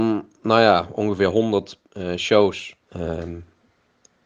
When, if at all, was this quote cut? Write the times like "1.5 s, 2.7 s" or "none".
2.8 s